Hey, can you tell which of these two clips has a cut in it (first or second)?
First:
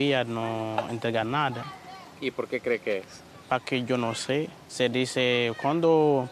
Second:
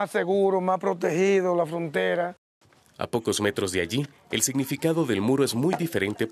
first